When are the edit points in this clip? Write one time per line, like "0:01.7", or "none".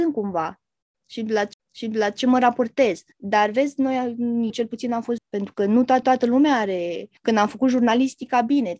0:01.5
0:03.1
0:04.5
0:05.2
0:06.0
0:07.2